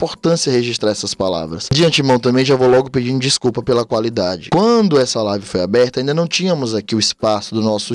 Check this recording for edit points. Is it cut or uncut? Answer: uncut